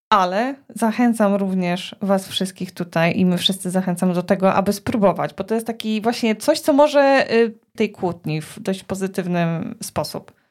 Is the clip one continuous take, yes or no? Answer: no